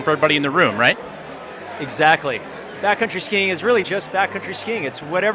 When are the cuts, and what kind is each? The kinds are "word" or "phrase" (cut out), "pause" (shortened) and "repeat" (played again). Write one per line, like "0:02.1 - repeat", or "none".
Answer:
0:03.8 - word